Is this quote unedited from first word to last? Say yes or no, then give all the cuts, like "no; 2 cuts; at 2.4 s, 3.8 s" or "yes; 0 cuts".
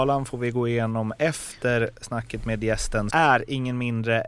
no; 1 cut; at 3.1 s